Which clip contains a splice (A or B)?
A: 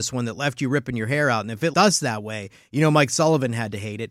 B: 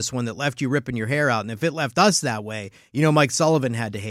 A